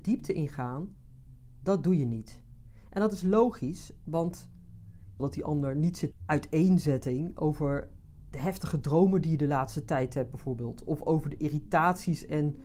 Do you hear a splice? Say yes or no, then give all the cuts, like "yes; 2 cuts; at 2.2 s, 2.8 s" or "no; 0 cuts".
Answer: yes; 2 cuts; at 5.2 s, 6.1 s